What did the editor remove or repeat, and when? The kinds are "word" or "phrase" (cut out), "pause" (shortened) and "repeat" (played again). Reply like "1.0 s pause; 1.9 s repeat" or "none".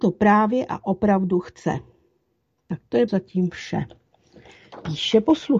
3.1 s word